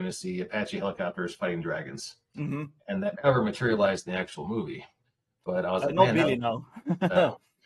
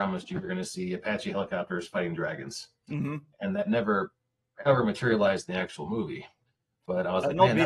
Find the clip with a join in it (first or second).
first